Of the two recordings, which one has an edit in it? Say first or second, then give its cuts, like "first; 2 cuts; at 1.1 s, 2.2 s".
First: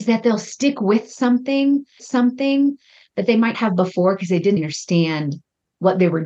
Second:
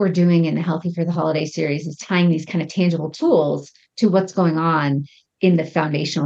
first; 3 cuts; at 2.0 s, 3.5 s, 4.6 s